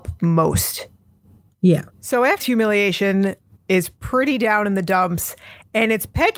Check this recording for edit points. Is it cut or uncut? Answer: cut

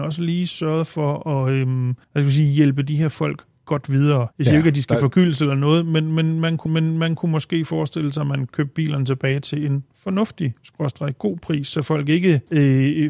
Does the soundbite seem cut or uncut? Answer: cut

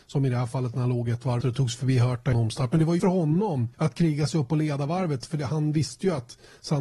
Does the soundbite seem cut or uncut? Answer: cut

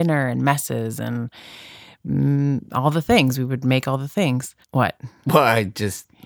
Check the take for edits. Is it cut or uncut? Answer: cut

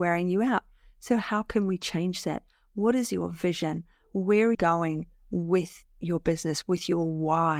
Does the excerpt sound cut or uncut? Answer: cut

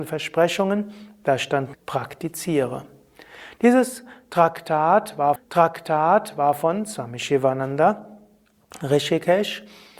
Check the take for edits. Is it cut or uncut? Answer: cut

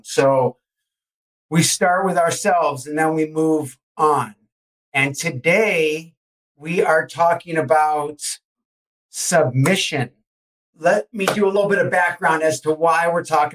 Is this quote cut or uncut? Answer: uncut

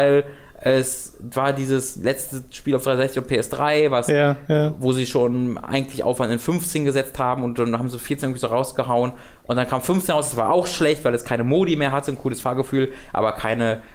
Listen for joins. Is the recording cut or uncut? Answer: uncut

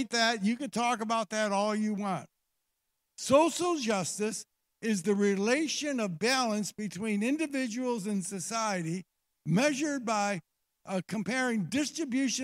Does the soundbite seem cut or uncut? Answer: uncut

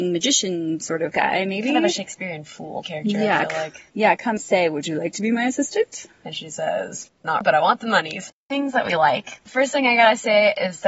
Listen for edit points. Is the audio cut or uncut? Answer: cut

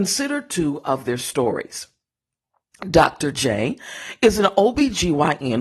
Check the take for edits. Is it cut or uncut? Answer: uncut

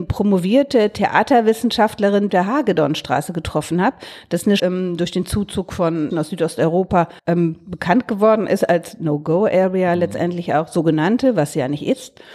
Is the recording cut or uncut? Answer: cut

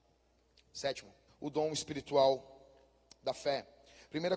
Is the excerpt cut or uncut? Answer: cut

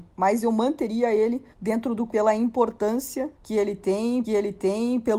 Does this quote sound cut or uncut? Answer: cut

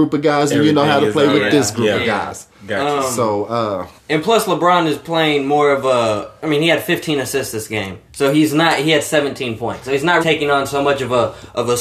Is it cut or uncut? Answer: cut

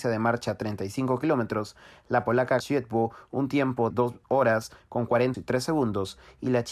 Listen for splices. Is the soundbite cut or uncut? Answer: cut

